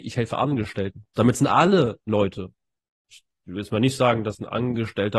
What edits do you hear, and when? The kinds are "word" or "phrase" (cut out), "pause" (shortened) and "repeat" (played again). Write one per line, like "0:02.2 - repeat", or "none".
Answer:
0:02.1 - word